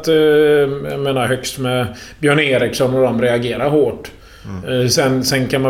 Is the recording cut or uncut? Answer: uncut